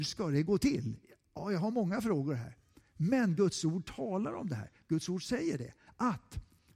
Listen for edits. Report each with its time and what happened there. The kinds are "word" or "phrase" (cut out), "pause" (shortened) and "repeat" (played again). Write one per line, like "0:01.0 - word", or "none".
none